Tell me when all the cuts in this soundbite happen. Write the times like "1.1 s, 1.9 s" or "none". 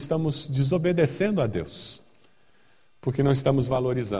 none